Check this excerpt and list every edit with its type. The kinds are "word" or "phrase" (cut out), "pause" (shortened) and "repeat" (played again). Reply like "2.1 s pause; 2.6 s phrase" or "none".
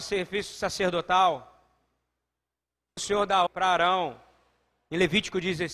3.0 s word; 3.5 s word